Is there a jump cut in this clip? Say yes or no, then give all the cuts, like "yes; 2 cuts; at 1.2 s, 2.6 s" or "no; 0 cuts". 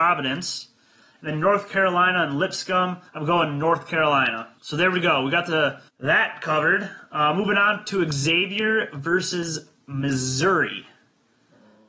yes; 3 cuts; at 3.1 s, 4.6 s, 5.9 s